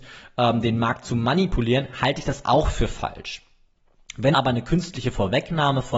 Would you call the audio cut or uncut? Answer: cut